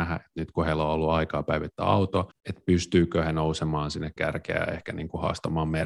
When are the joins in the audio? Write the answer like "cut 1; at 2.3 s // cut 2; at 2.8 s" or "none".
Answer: cut 1; at 2.3 s // cut 2; at 4.2 s